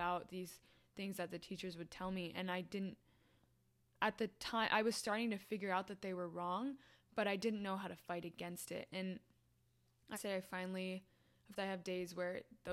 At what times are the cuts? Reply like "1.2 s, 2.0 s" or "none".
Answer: 10.1 s, 11.6 s

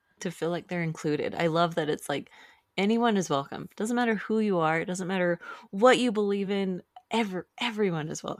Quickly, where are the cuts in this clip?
none

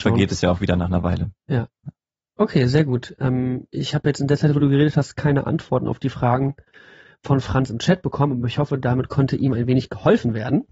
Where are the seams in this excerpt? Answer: none

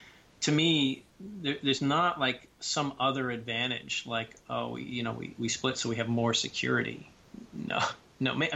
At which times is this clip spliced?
1.1 s, 2.5 s

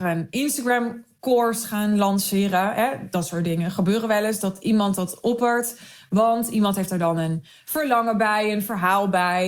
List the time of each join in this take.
none

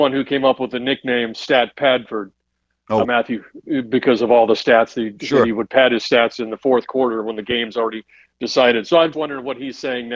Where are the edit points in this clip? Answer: 3.0 s, 9.1 s

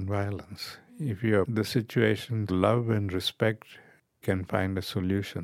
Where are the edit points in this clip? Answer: 1.4 s, 2.5 s, 4.2 s

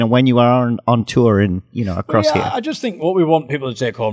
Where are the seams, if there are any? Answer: none

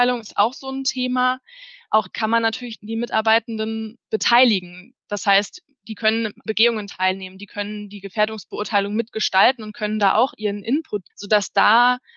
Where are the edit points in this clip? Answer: 2.1 s, 2.8 s, 6.5 s, 11.1 s

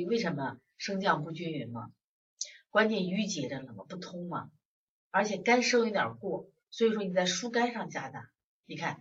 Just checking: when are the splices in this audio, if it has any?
none

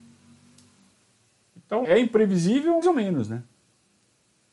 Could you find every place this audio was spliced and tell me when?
1.8 s, 2.8 s

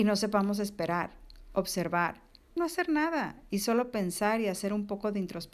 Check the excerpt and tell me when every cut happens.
2.6 s

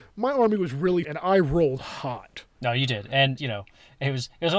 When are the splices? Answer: 1.0 s, 3.4 s

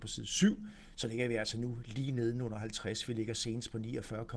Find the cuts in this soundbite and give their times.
none

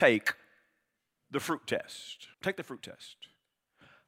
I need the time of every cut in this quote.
2.3 s

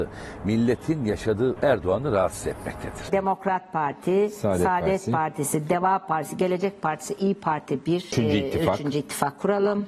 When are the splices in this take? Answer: 1.6 s

